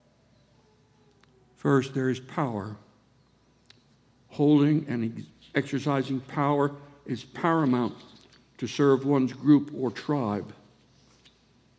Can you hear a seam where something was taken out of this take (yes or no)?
no